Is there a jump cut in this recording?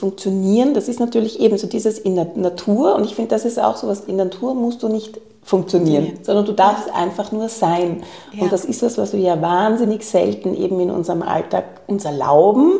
no; 0 cuts

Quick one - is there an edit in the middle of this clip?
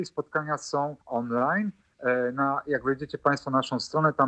yes; 1 cut; at 1.0 s

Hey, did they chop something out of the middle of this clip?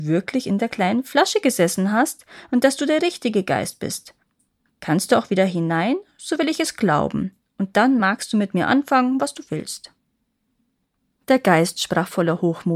no; 0 cuts

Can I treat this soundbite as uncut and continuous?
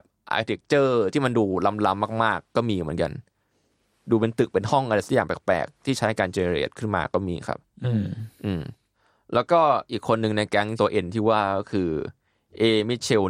yes; 0 cuts

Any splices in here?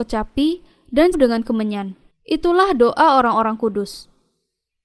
yes; 2 cuts; at 1.1 s, 2.1 s

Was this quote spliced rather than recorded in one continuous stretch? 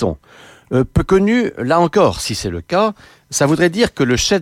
no; 0 cuts

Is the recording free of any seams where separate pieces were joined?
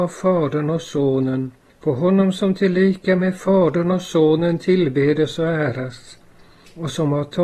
yes; 0 cuts

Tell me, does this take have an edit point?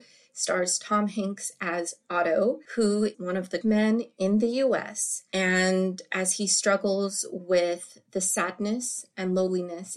yes; 2 cuts; at 3.1 s, 3.6 s

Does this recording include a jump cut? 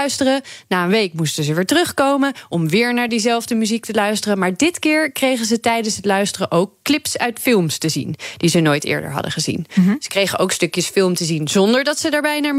no; 0 cuts

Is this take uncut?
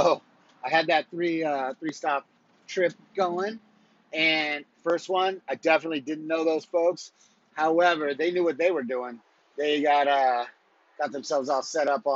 yes; 0 cuts

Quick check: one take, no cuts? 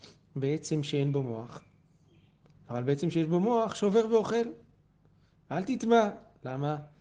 yes; 0 cuts

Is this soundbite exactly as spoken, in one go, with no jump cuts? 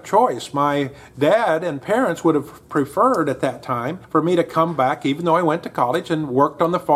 no; 1 cut; at 4.0 s

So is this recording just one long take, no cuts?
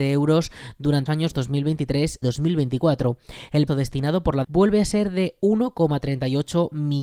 no; 4 cuts; at 1.1 s, 2.2 s, 3.7 s, 4.4 s

